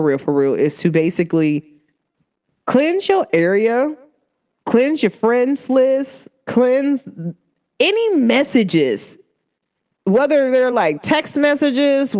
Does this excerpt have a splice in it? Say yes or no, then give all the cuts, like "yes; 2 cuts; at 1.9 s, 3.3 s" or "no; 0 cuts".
no; 0 cuts